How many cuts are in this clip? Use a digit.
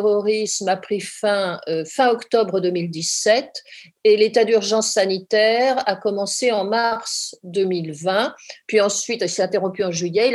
0